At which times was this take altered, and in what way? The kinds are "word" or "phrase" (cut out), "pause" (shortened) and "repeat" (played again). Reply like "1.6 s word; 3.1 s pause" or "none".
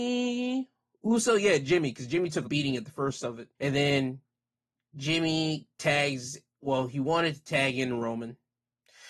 2.4 s phrase; 3.5 s pause; 5.7 s pause